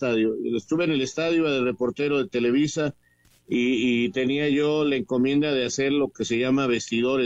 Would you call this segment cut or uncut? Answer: uncut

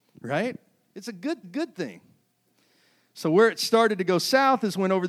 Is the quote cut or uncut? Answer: cut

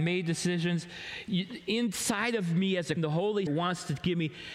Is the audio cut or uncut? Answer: cut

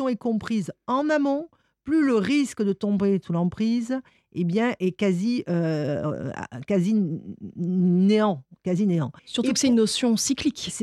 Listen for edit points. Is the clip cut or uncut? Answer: cut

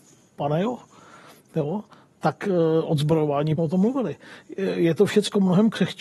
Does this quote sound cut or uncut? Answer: cut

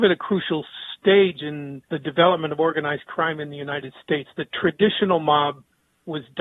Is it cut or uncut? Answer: cut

